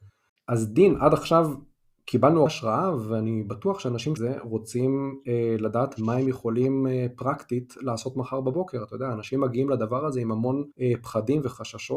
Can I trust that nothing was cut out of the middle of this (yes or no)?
no